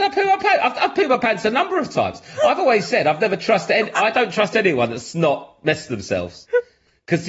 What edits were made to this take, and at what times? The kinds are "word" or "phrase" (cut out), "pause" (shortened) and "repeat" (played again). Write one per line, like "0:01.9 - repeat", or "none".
none